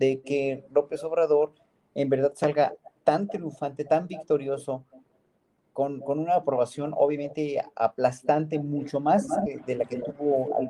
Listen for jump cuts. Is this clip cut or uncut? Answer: uncut